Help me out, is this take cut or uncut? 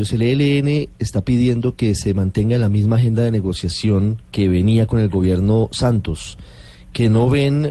uncut